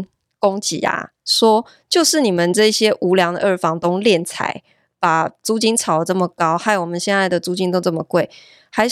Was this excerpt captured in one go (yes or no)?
yes